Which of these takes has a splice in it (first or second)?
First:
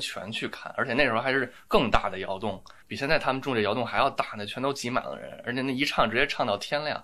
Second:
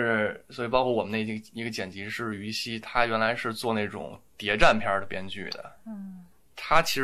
first